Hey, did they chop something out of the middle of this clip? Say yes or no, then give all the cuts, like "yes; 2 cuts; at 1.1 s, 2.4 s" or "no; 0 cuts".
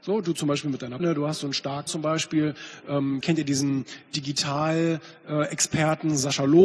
yes; 3 cuts; at 1.0 s, 1.9 s, 3.2 s